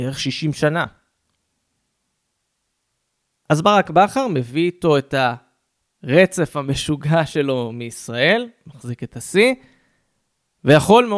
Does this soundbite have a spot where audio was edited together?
no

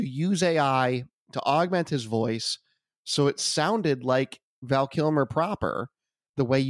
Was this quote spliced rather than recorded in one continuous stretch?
no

